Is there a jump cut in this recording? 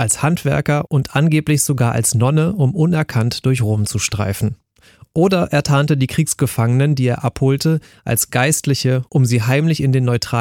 no; 0 cuts

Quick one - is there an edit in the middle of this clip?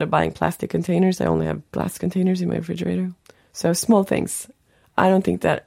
yes; 2 cuts; at 1.7 s, 3.2 s

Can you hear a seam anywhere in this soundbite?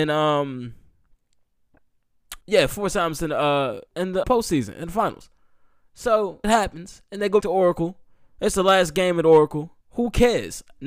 yes; 6 cuts; at 2.4 s, 3.9 s, 4.2 s, 6.4 s, 7.4 s, 9.8 s

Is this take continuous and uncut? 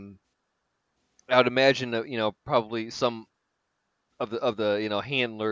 yes; 0 cuts

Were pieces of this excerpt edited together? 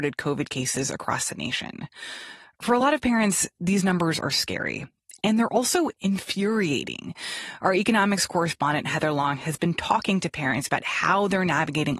no; 0 cuts

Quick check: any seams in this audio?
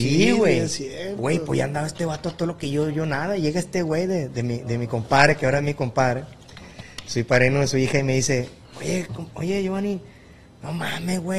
no; 0 cuts

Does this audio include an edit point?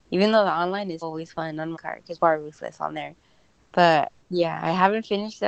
yes; 4 cuts; at 1.0 s, 1.7 s, 2.2 s, 4.2 s

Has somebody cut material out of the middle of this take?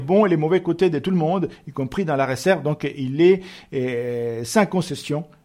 no; 0 cuts

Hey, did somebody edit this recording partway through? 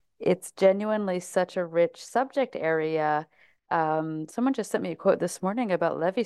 no; 0 cuts

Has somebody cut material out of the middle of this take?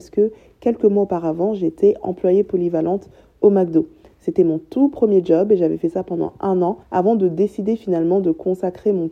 yes; 1 cut; at 6.8 s

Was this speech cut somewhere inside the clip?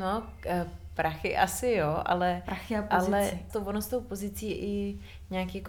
yes; 1 cut; at 3.5 s

